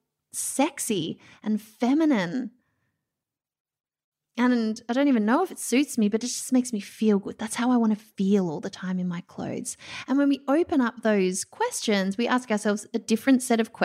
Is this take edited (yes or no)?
no